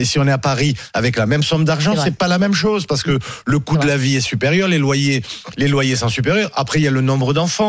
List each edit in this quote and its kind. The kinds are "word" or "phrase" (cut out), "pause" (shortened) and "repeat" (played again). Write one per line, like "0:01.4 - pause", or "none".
none